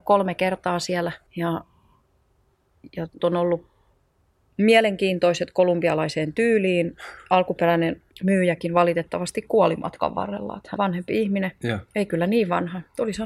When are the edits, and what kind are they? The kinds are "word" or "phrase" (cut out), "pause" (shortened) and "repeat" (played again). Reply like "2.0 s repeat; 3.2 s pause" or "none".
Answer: 1.3 s pause; 3.2 s word; 8.1 s pause; 10.8 s word